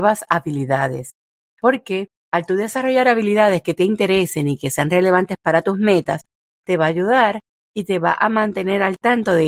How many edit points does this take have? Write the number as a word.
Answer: zero